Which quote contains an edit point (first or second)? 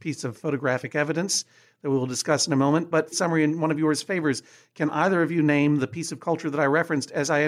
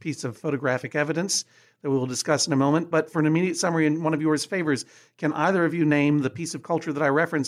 first